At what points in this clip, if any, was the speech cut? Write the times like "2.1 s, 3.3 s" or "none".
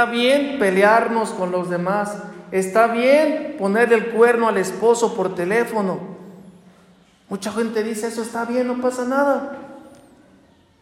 none